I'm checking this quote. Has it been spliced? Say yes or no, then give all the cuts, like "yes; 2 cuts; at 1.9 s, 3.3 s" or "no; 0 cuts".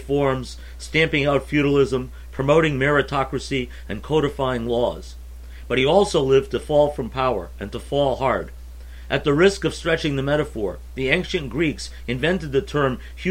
no; 0 cuts